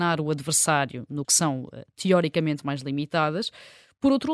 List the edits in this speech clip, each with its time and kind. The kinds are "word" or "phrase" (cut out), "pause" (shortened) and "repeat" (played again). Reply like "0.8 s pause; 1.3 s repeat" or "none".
1.2 s phrase